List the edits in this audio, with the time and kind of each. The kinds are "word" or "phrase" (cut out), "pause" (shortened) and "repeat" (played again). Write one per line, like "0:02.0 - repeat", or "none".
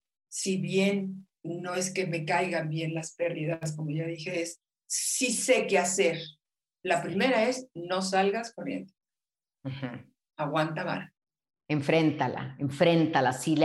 none